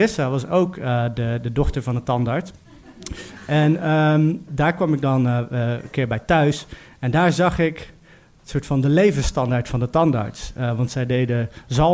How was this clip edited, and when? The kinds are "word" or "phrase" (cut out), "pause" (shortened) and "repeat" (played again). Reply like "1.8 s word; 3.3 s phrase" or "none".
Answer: none

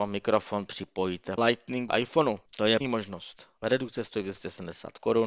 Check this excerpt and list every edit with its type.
1.4 s word; 1.9 s word; 2.5 s pause; 2.8 s word; 3.6 s pause

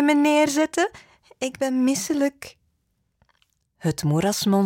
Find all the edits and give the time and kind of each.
none

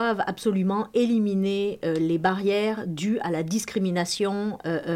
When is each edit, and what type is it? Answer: none

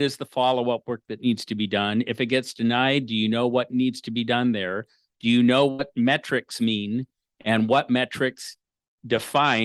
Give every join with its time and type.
none

